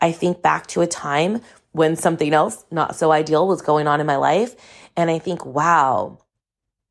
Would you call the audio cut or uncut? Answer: uncut